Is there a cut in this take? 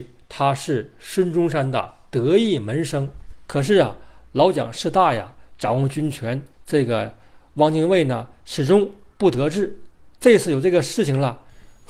yes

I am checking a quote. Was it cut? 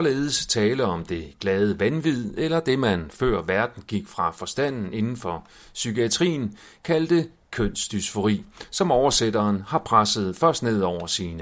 no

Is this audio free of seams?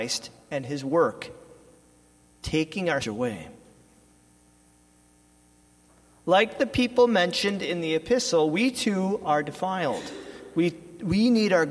no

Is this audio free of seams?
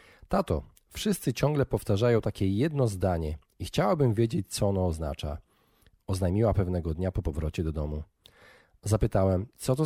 yes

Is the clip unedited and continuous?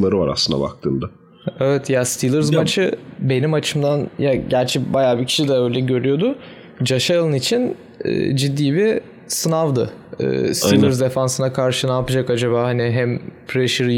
yes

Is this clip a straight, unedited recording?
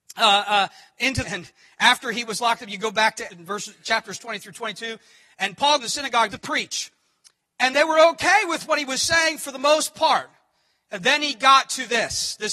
no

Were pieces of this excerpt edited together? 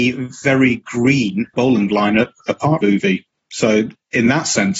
yes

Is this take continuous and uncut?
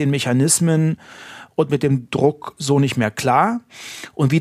yes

